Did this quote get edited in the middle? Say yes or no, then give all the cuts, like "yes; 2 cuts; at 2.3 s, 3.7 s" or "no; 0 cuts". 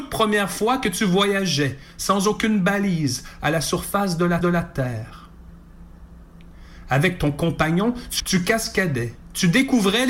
yes; 2 cuts; at 4.4 s, 8.2 s